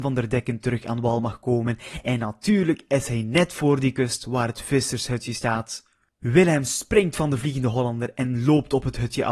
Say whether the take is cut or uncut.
uncut